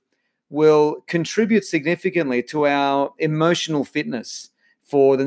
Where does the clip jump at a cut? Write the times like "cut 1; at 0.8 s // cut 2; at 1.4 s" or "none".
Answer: none